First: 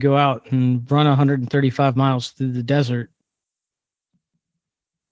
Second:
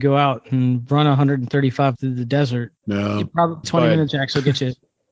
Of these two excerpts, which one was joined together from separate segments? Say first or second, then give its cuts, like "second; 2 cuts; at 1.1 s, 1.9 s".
second; 4 cuts; at 1.9 s, 2.8 s, 3.6 s, 4.1 s